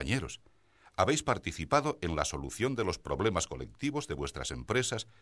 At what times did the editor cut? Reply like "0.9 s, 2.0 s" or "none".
none